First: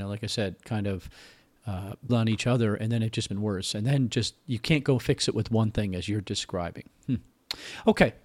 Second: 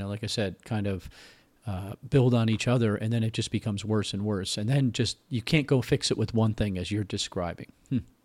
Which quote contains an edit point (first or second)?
first